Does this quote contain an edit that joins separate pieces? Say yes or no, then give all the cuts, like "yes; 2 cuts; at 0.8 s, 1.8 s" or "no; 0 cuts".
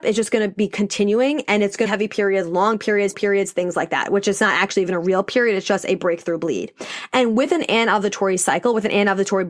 yes; 2 cuts; at 1.9 s, 3.1 s